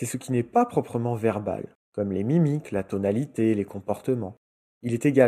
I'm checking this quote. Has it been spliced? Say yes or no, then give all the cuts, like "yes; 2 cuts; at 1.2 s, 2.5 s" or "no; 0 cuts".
no; 0 cuts